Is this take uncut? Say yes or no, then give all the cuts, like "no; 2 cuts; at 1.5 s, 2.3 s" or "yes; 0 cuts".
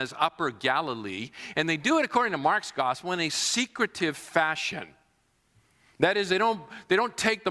yes; 0 cuts